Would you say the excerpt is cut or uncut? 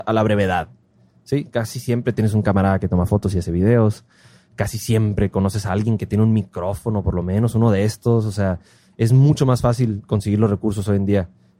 uncut